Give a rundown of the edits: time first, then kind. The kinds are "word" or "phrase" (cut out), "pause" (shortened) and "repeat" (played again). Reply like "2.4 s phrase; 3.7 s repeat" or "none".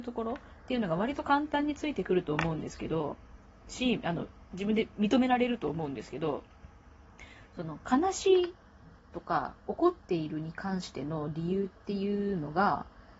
none